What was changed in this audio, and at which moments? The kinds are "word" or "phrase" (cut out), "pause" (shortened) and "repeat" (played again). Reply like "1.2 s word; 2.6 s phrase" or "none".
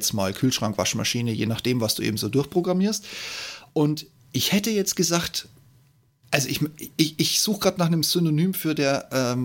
none

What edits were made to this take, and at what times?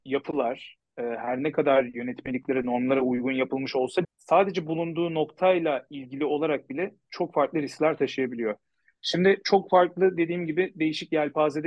4.0 s word

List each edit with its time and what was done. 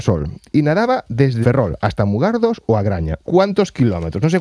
1.4 s phrase; 3.2 s word

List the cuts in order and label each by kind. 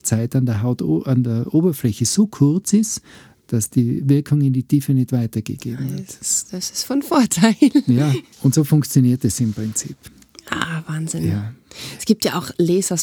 none

